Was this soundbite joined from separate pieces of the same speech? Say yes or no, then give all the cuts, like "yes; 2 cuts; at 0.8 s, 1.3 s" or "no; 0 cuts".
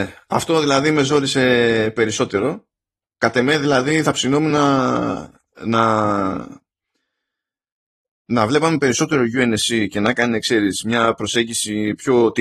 no; 0 cuts